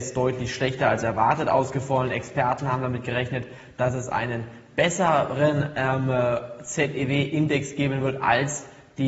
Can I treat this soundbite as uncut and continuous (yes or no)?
yes